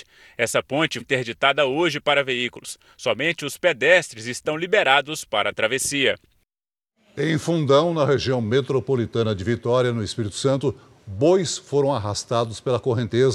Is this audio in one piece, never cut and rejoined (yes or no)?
no